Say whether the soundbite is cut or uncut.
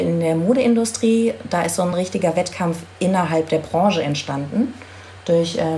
uncut